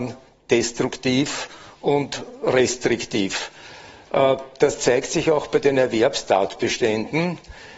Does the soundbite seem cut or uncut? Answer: uncut